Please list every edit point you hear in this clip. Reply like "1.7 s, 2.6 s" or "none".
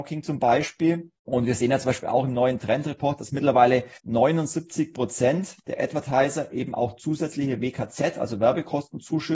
1.2 s, 4.0 s